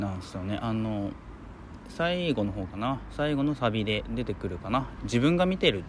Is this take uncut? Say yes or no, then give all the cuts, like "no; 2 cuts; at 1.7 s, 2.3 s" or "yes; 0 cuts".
no; 1 cut; at 5.0 s